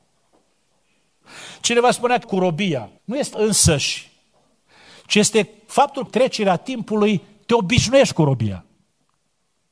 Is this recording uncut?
no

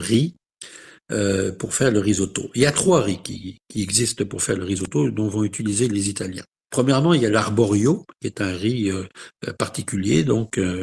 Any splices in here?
yes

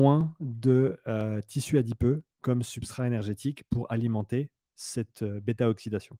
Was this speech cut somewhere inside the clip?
no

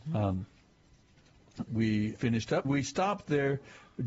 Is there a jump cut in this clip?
yes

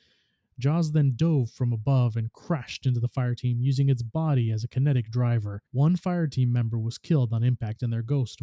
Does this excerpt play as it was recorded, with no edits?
no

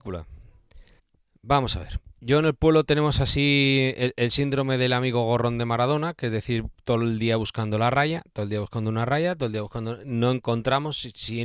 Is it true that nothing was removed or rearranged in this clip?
no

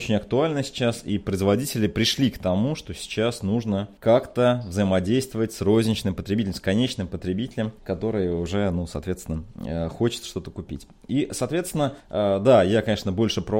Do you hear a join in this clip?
yes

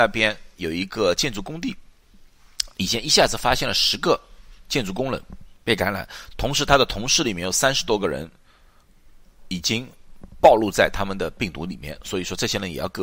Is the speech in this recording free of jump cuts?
yes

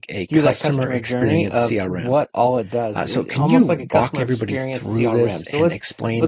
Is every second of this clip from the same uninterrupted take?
yes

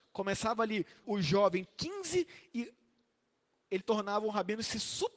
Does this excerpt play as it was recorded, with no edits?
no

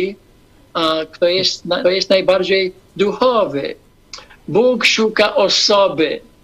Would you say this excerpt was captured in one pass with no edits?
no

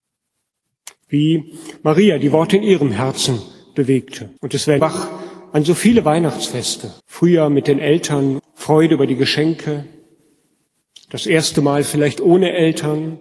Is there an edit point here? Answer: yes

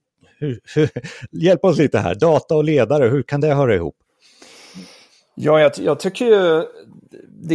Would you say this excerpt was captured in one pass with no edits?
yes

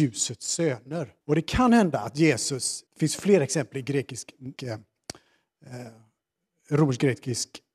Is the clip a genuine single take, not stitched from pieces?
no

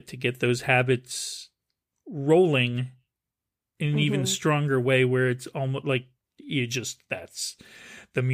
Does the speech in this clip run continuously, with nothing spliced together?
yes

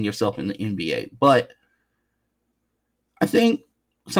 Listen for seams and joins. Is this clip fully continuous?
yes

